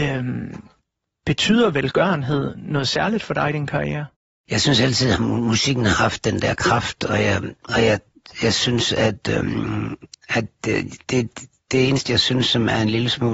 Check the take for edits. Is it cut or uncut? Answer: uncut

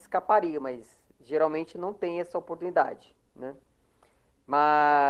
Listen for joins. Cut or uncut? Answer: cut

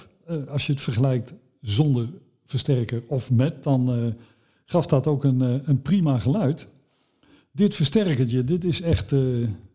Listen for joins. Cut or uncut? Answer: uncut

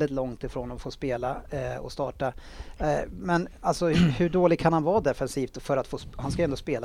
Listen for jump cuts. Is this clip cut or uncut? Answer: uncut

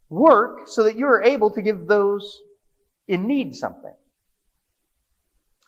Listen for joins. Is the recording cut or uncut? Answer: uncut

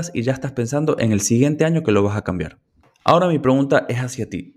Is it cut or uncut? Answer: uncut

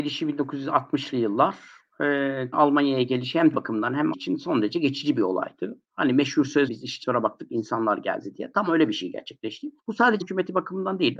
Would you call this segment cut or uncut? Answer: cut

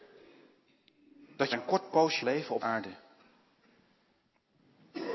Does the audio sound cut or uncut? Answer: cut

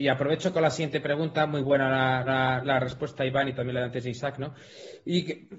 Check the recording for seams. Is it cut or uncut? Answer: cut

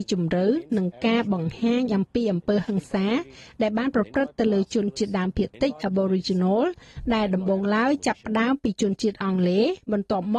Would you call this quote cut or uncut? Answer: uncut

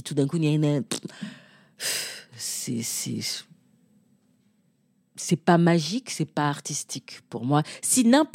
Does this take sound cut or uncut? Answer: uncut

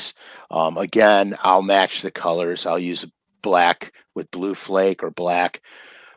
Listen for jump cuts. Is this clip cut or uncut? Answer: uncut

